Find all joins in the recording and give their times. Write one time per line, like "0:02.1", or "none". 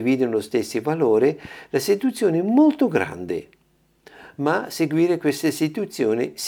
none